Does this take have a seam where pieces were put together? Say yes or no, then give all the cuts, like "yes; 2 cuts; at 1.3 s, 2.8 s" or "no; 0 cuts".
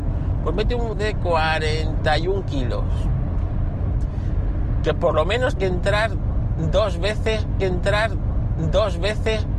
yes; 3 cuts; at 0.9 s, 5.6 s, 7.6 s